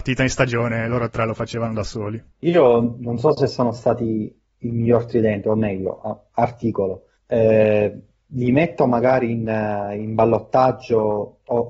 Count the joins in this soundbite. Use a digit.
2